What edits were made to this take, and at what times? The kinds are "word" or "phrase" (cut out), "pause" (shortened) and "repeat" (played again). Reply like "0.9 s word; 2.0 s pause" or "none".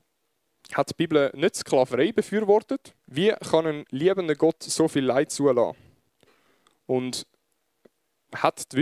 3.0 s pause